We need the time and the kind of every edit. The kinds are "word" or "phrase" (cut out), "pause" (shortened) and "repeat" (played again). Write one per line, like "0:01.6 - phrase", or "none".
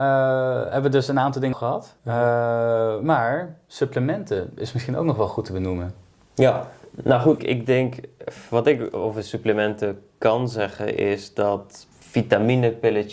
0:01.5 - word
0:02.0 - pause
0:07.4 - word
0:11.9 - pause